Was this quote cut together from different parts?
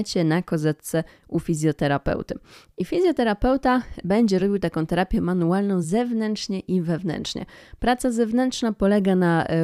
no; 0 cuts

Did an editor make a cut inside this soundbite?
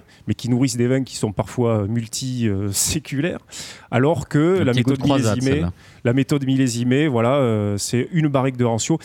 no; 0 cuts

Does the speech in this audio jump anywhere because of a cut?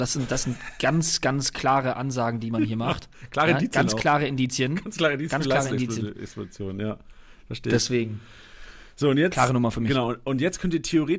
no; 0 cuts

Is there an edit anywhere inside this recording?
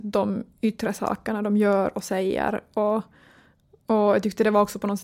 no; 0 cuts

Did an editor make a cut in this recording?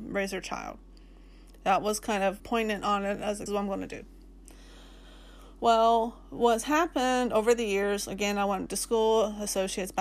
yes; 3 cuts; at 2.4 s, 3.5 s, 8.7 s

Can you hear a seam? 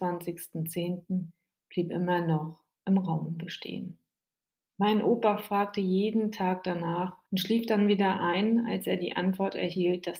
no; 0 cuts

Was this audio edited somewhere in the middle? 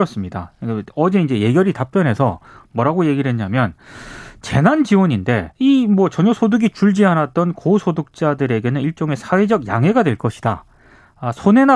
yes; 1 cut; at 5.5 s

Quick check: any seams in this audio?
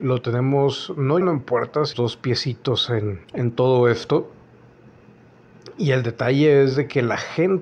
yes; 3 cuts; at 1.2 s, 1.9 s, 3.2 s

